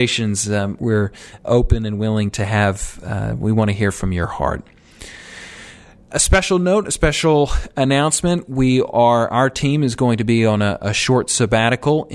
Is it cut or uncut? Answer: uncut